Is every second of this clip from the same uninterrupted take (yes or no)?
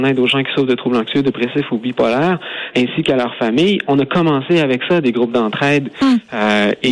no